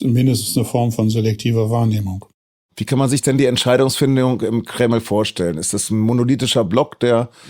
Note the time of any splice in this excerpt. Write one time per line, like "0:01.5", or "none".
none